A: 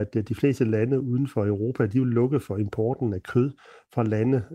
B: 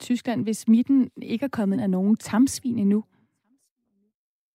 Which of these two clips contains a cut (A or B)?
B